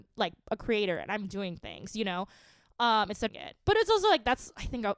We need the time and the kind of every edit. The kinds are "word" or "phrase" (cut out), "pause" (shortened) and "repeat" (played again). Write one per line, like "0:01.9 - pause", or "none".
0:03.3 - phrase